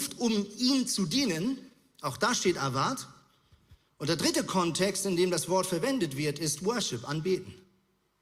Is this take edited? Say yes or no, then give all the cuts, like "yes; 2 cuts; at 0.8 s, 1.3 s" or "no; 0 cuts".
no; 0 cuts